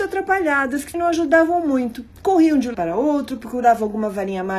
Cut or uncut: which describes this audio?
cut